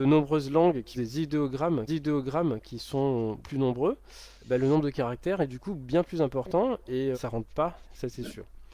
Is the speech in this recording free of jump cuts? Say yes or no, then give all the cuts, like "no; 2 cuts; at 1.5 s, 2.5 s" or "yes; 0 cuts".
no; 6 cuts; at 0.9 s, 1.9 s, 3.4 s, 4.4 s, 7.1 s, 7.8 s